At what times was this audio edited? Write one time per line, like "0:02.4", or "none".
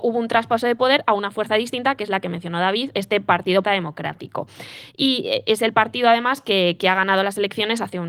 0:03.6